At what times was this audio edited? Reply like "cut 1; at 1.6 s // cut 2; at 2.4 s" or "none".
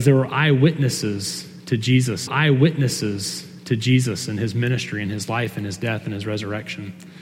cut 1; at 2.3 s